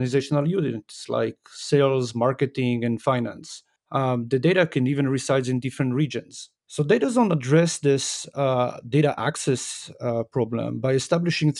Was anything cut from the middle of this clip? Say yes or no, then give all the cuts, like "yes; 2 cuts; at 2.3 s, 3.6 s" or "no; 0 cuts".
yes; 2 cuts; at 3.8 s, 6.6 s